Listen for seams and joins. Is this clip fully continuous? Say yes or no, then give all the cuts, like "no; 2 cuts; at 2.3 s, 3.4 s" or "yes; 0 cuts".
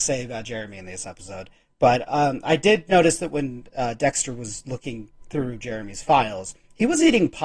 yes; 0 cuts